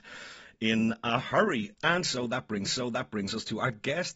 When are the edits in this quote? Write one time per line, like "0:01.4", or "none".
0:02.7